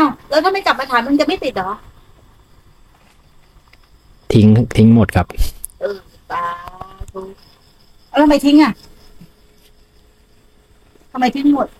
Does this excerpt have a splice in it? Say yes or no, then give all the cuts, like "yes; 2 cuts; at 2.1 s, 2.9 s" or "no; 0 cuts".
no; 0 cuts